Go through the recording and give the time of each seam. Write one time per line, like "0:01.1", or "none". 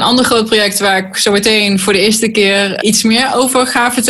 0:01.1
0:02.8